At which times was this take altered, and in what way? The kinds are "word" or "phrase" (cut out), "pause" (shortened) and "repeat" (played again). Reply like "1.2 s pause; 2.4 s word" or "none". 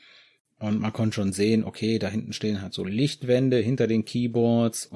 none